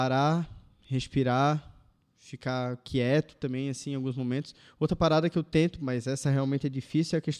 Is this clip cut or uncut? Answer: uncut